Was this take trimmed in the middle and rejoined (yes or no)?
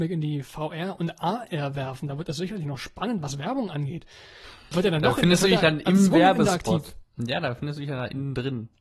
no